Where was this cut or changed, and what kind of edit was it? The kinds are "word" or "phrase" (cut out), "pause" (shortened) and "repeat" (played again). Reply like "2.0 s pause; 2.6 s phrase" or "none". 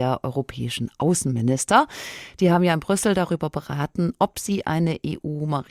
none